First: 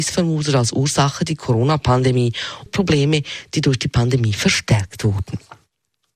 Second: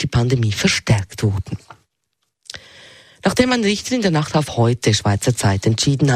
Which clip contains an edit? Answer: first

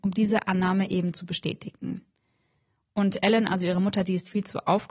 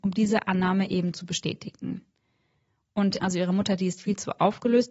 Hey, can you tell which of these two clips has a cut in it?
second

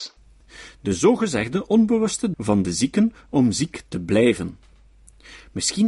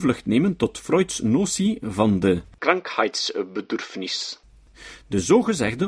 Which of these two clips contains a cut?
first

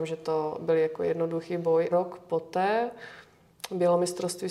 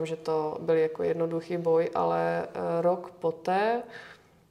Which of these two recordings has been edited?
first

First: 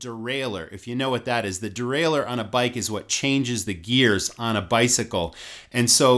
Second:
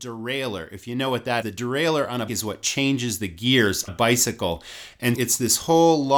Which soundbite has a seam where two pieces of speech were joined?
second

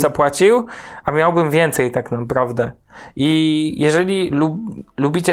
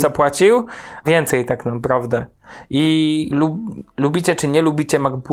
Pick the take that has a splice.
second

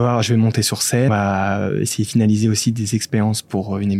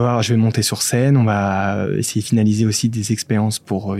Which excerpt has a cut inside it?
first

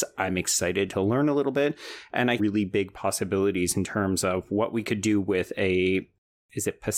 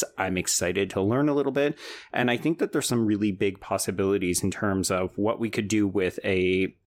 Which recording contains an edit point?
first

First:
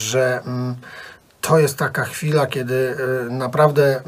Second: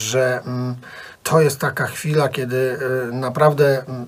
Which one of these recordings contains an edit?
second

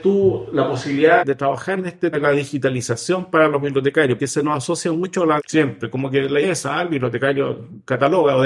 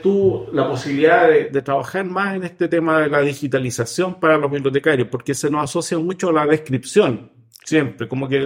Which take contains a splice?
first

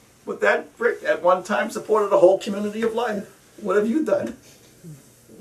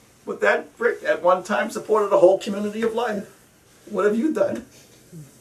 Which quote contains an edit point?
first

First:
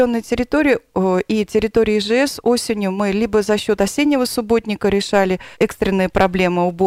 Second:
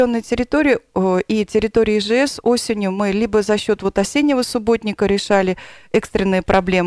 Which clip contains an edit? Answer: first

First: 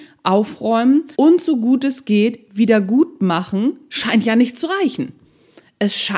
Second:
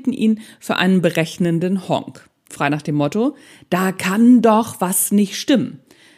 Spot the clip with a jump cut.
first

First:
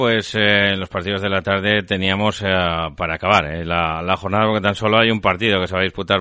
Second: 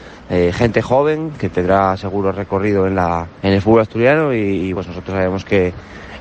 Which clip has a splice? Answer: second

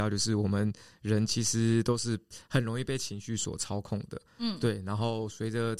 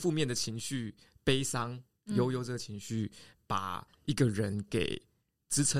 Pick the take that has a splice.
first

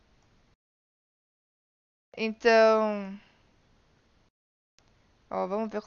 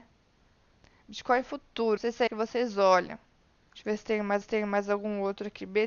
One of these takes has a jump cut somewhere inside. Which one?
second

